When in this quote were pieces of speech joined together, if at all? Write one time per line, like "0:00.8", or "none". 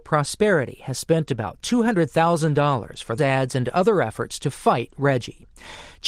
0:03.2